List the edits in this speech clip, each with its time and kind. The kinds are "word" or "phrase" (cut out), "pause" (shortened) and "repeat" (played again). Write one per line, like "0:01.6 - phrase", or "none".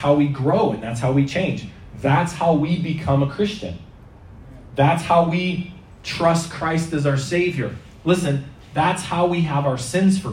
none